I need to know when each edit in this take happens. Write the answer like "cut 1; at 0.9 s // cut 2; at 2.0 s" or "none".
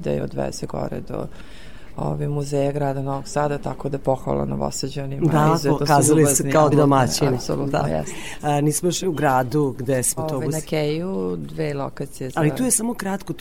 cut 1; at 6.7 s // cut 2; at 9.0 s // cut 3; at 10.2 s